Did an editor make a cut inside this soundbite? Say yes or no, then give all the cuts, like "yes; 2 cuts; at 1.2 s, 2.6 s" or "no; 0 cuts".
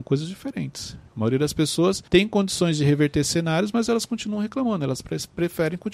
yes; 2 cuts; at 1.1 s, 2.1 s